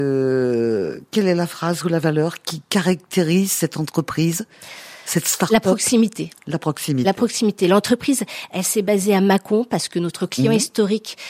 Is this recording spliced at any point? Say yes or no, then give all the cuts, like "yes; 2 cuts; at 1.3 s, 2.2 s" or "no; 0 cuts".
no; 0 cuts